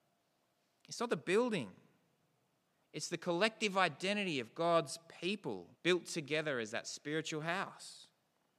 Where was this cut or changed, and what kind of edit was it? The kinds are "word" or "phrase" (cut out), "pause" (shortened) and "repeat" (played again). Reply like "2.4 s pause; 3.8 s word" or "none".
5.7 s pause